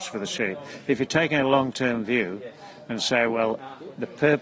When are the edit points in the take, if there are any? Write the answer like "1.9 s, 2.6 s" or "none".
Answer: none